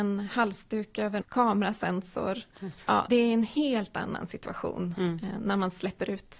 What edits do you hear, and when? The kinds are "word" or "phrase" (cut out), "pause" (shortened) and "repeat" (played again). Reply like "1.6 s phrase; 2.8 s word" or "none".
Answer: 1.2 s word; 3.1 s phrase